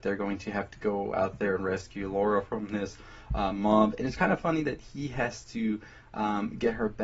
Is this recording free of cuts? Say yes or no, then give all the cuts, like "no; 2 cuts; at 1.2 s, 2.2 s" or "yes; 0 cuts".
yes; 0 cuts